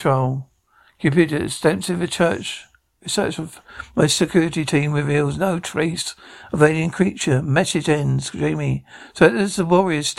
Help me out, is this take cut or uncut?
uncut